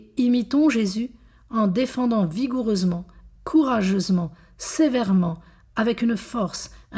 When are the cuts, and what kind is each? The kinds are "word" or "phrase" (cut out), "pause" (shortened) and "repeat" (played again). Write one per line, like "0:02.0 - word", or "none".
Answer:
0:03.4 - word

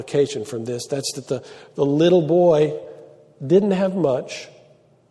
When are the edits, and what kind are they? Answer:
none

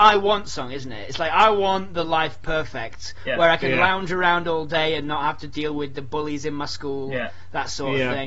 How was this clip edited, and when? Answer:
none

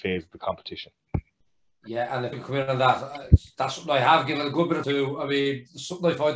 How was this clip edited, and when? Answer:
0:02.3 - word
0:04.8 - word

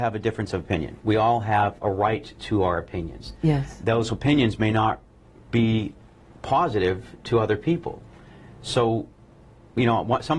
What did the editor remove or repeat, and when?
none

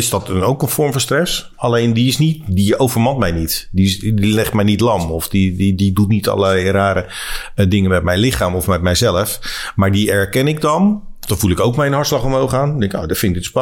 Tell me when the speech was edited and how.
none

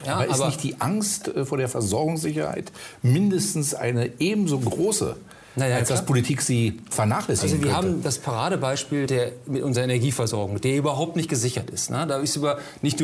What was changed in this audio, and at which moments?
0:06.9 - word
0:09.1 - word

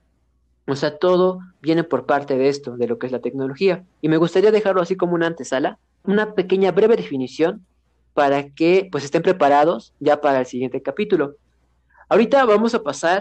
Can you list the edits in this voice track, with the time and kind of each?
0:06.0 - word

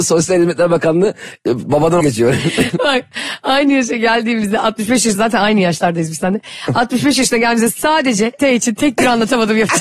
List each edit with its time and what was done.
0:02.0 - word
0:05.1 - word
0:08.4 - word

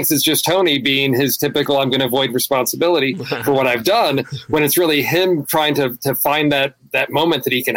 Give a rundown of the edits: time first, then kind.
none

